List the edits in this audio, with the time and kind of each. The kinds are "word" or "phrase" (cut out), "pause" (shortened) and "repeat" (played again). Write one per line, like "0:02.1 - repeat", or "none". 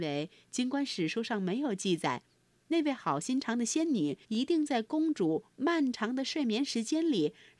0:04.2 - pause